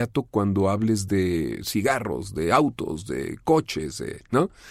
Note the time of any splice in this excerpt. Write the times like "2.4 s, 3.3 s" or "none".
none